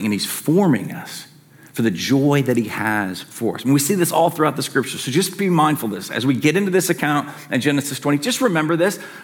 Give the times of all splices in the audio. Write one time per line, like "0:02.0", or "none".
none